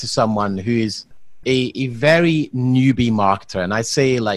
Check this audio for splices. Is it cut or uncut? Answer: uncut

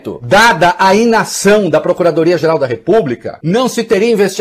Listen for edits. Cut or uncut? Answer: uncut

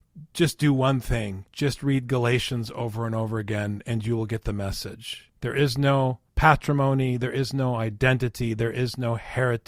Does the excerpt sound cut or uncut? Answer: cut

